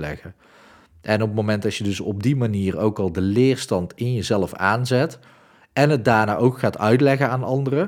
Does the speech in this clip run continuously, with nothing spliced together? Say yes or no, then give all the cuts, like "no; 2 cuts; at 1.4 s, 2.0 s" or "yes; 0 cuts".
yes; 0 cuts